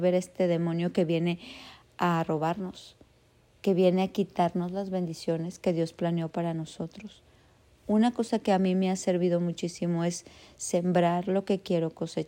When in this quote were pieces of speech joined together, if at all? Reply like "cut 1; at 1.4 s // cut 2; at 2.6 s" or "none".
none